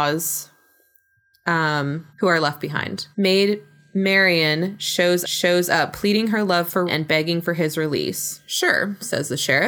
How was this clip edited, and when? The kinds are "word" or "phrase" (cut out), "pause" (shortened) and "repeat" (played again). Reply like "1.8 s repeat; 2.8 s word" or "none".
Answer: 2.1 s pause; 3.1 s pause; 5.2 s repeat; 6.9 s word